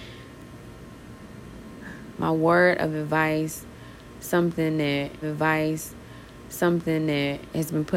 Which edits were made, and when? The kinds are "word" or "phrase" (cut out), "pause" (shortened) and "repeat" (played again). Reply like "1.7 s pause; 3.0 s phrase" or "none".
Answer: 2.2 s word; 5.2 s repeat